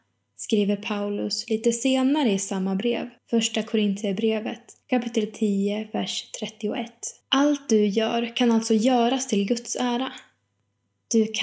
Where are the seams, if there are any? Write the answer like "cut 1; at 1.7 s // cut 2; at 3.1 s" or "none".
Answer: cut 1; at 3.2 s // cut 2; at 4.8 s // cut 3; at 7.2 s

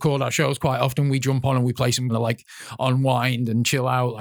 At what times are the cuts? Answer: cut 1; at 2.1 s

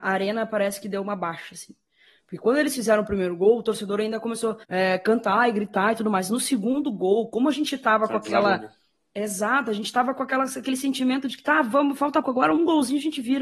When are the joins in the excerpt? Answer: cut 1; at 4.6 s // cut 2; at 12.2 s

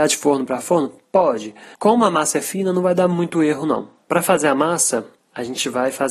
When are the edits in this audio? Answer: cut 1; at 1.7 s

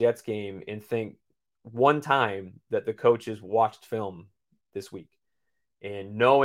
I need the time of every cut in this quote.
none

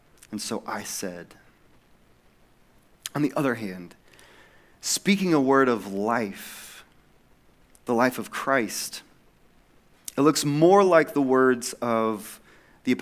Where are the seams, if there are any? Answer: none

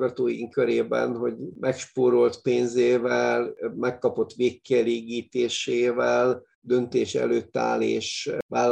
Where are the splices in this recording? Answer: none

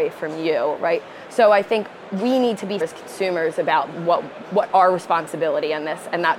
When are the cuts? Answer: cut 1; at 2.8 s

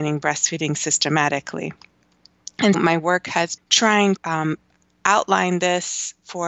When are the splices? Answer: cut 1; at 2.7 s // cut 2; at 3.6 s // cut 3; at 4.2 s

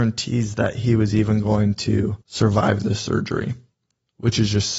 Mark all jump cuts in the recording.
cut 1; at 2.2 s

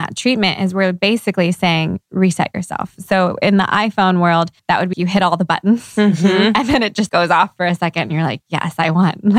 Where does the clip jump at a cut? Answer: cut 1; at 4.6 s // cut 2; at 4.9 s // cut 3; at 7.1 s

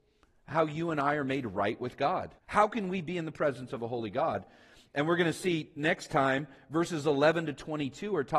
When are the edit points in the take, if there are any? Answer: cut 1; at 2.4 s

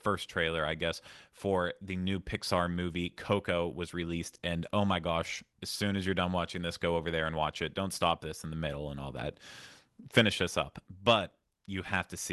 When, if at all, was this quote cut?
cut 1; at 5.5 s

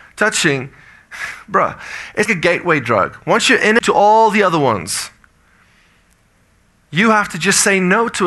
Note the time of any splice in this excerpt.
cut 1; at 2.3 s // cut 2; at 3.8 s

